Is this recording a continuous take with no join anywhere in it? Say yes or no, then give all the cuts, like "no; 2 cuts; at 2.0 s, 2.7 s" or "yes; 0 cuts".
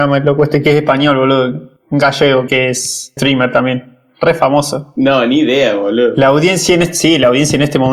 no; 3 cuts; at 1.8 s, 2.5 s, 3.2 s